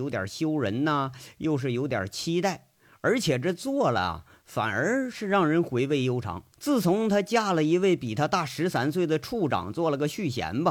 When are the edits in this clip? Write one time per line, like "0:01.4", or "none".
0:06.5